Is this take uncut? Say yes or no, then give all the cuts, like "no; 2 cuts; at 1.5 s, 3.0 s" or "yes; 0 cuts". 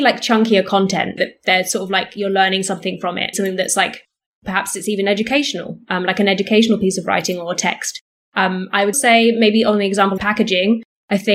no; 4 cuts; at 1.2 s, 3.3 s, 8.9 s, 10.2 s